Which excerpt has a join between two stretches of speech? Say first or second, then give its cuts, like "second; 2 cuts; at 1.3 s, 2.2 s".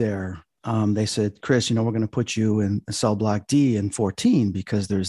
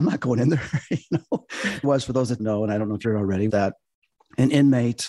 second; 4 cuts; at 1.8 s, 2.4 s, 3.0 s, 3.5 s